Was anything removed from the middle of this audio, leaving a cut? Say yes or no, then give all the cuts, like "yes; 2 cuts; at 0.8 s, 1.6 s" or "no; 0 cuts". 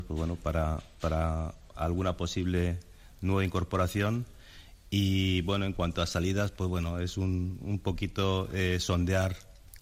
no; 0 cuts